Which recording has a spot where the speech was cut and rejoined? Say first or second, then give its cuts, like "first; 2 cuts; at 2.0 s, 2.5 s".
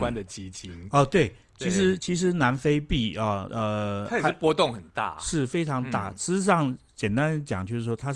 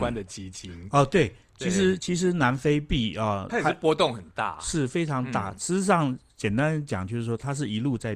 second; 1 cut; at 3.5 s